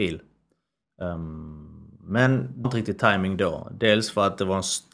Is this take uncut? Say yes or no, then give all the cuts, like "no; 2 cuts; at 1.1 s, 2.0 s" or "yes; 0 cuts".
no; 1 cut; at 2.6 s